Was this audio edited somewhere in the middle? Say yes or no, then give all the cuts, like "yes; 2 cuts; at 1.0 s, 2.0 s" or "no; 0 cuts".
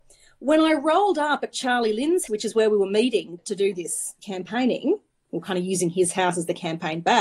yes; 3 cuts; at 2.3 s, 3.4 s, 4.2 s